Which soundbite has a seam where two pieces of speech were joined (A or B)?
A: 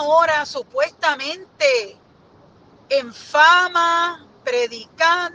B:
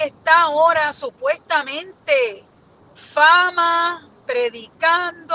B